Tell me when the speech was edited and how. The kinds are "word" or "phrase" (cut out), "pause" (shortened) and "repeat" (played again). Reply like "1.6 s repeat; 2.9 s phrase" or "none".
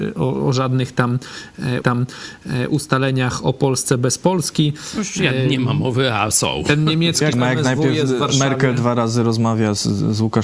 1.8 s repeat; 7.3 s word